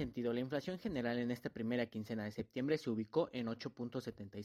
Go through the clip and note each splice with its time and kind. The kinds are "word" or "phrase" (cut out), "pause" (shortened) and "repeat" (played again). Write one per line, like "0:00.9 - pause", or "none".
none